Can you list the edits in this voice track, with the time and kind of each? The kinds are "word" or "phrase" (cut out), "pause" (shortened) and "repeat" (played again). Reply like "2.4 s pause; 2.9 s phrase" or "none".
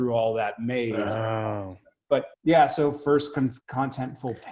2.3 s pause; 3.6 s pause